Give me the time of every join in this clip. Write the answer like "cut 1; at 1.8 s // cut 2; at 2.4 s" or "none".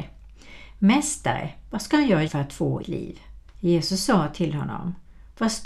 cut 1; at 2.3 s // cut 2; at 2.8 s // cut 3; at 3.5 s